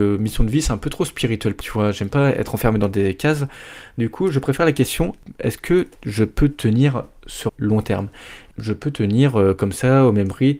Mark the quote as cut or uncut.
cut